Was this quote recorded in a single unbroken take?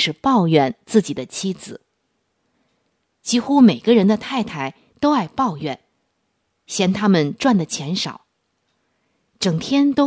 yes; 0 cuts

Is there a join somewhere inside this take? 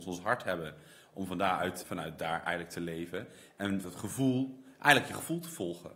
yes; 2 cuts; at 1.8 s, 3.8 s

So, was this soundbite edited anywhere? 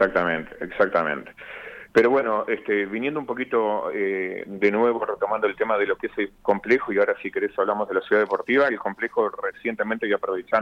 no; 0 cuts

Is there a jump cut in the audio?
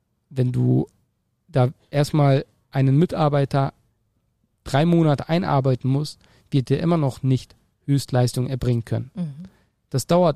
no; 0 cuts

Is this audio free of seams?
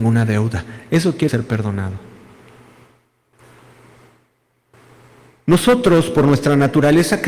no; 1 cut; at 1.3 s

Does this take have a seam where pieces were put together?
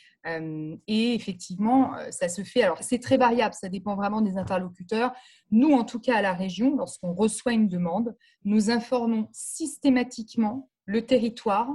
yes; 1 cut; at 2.8 s

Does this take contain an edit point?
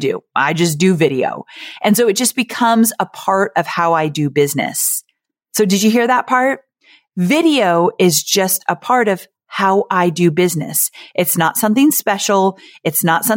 no; 0 cuts

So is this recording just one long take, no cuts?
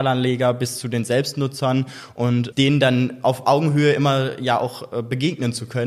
no; 1 cut; at 2.5 s

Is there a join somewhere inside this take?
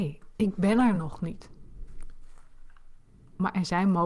no; 0 cuts

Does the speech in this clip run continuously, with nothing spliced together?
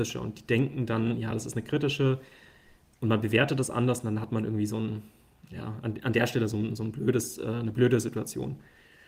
yes; 0 cuts

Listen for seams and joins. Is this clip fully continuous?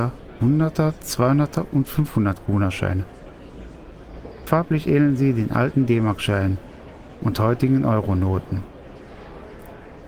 yes; 0 cuts

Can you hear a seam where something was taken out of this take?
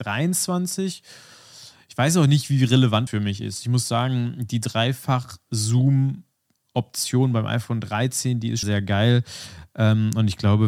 yes; 2 cuts; at 3.1 s, 8.6 s

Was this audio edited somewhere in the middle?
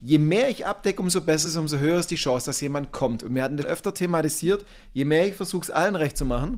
yes; 2 cuts; at 1.5 s, 3.6 s

